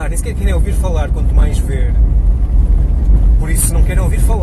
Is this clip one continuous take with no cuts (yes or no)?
yes